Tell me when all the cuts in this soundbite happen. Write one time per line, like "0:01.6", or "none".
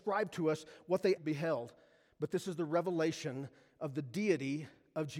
0:01.2